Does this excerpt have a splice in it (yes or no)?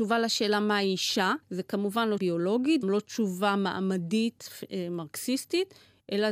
yes